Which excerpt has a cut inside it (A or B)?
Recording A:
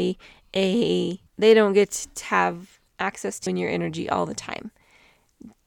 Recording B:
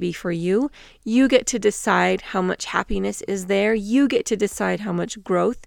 A